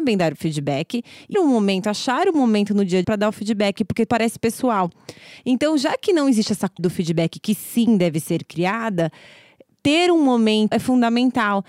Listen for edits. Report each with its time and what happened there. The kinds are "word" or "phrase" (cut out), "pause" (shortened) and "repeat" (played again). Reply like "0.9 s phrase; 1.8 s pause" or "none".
1.3 s word; 3.0 s word; 4.1 s word; 6.8 s word; 10.7 s word